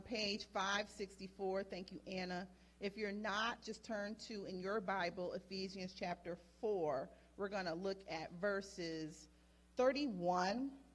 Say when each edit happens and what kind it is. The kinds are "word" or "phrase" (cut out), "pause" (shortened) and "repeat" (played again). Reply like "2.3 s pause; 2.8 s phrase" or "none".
none